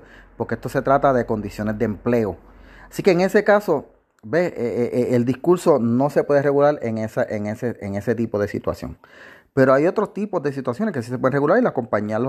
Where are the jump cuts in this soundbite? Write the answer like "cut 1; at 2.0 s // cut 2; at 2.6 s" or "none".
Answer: none

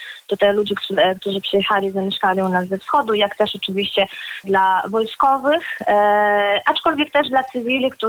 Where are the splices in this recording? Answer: cut 1; at 4.4 s

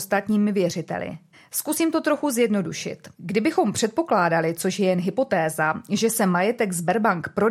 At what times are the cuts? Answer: cut 1; at 1.3 s // cut 2; at 3.1 s

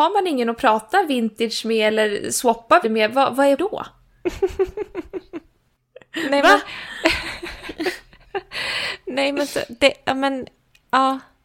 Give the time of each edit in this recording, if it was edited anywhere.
cut 1; at 2.8 s // cut 2; at 3.6 s

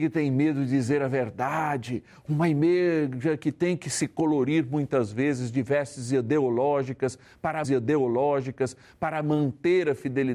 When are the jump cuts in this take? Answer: cut 1; at 7.6 s

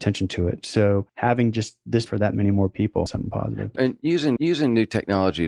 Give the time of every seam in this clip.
cut 1; at 1.1 s // cut 2; at 2.1 s // cut 3; at 3.1 s // cut 4; at 3.8 s // cut 5; at 4.4 s

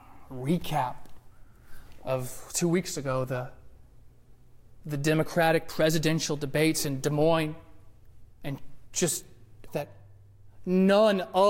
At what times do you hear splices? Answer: cut 1; at 8.3 s // cut 2; at 9.7 s

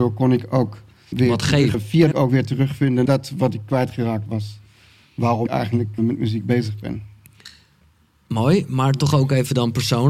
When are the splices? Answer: cut 1; at 1.1 s // cut 2; at 1.7 s // cut 3; at 2.1 s // cut 4; at 3.1 s // cut 5; at 5.5 s // cut 6; at 6.0 s

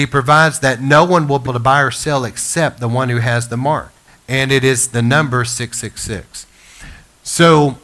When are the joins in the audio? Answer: cut 1; at 1.5 s // cut 2; at 4.1 s

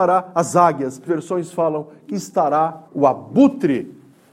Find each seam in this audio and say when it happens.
cut 1; at 1.1 s // cut 2; at 2.1 s // cut 3; at 2.9 s

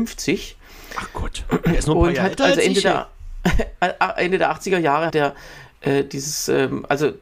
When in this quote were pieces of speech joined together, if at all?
cut 1; at 5.1 s

